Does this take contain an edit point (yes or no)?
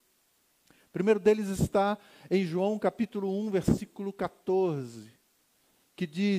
no